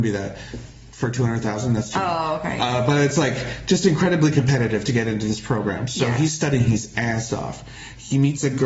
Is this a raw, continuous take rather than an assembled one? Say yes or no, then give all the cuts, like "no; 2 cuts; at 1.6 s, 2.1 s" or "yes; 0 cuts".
yes; 0 cuts